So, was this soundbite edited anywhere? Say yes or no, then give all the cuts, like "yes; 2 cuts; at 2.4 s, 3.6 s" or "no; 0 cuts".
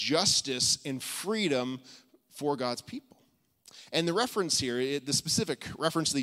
no; 0 cuts